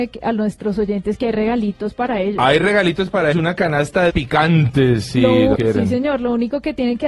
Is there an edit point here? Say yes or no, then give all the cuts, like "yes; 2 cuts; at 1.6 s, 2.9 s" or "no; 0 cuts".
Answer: yes; 3 cuts; at 3.3 s, 4.1 s, 5.5 s